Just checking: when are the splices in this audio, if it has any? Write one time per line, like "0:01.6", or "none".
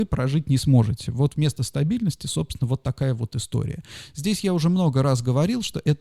none